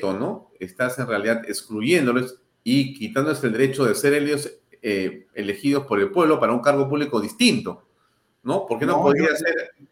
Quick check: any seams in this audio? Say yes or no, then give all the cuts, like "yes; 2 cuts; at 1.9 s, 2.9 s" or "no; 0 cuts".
no; 0 cuts